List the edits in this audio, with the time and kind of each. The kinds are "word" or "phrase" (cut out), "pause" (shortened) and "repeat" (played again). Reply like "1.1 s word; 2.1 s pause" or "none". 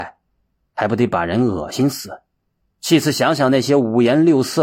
2.5 s pause